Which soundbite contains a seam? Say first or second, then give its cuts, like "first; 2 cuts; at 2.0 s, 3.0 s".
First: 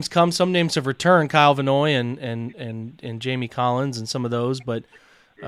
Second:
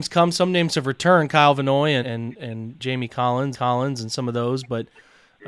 second; 3 cuts; at 2.0 s, 2.8 s, 3.5 s